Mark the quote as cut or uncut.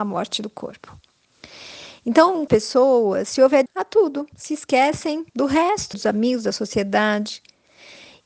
cut